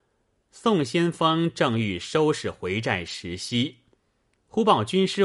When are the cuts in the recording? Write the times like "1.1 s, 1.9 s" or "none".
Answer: none